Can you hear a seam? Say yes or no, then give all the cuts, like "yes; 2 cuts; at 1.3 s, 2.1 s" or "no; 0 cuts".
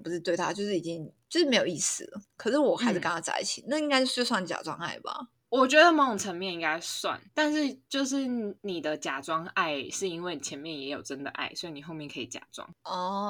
yes; 2 cuts; at 7.3 s, 8.6 s